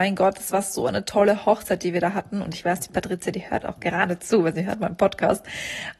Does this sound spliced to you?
no; 0 cuts

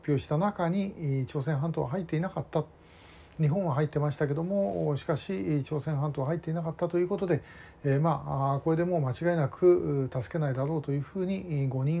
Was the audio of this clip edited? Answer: no; 0 cuts

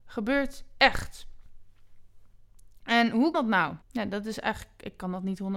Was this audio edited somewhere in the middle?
yes; 2 cuts; at 3.3 s, 3.8 s

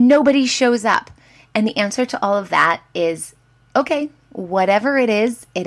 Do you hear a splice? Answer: no; 0 cuts

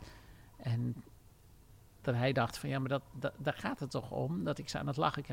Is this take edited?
no; 0 cuts

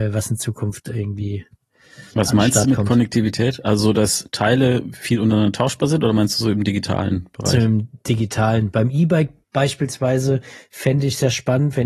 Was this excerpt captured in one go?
no; 2 cuts; at 2.1 s, 9.4 s

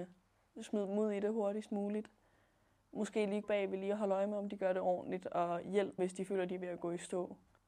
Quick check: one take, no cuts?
no; 2 cuts; at 3.4 s, 6.0 s

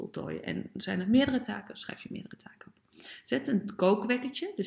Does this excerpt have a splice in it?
no; 0 cuts

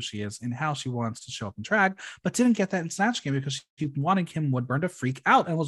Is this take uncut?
yes; 0 cuts

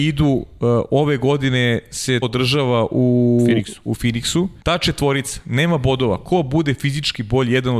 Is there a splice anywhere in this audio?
yes; 2 cuts; at 2.2 s, 4.6 s

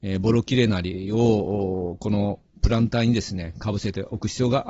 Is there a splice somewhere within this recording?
no; 0 cuts

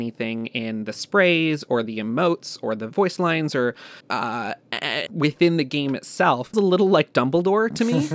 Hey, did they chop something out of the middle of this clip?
yes; 3 cuts; at 4.0 s, 5.1 s, 6.5 s

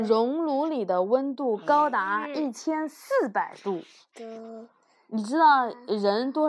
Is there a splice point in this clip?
no; 0 cuts

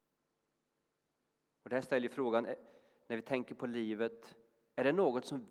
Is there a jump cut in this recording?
no; 0 cuts

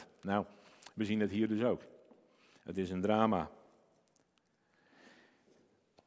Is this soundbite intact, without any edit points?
yes; 0 cuts

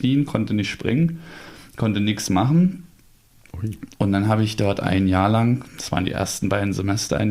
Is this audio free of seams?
yes; 0 cuts

